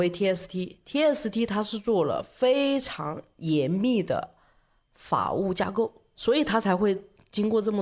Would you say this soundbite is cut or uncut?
cut